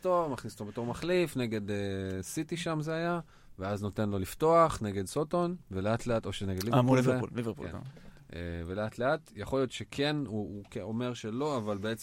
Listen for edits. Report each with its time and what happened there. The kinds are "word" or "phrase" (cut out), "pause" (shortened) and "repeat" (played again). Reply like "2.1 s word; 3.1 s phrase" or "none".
5.6 s pause